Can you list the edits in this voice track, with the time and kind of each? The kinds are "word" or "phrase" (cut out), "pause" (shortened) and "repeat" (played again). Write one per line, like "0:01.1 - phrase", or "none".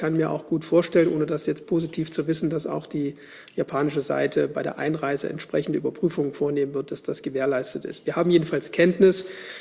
none